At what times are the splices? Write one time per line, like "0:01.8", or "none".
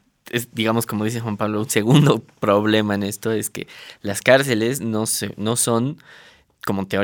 none